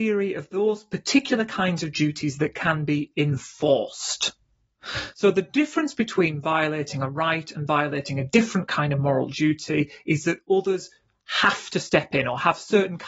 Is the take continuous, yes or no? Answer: yes